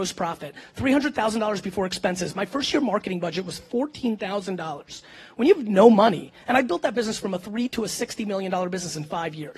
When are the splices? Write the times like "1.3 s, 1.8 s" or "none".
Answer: none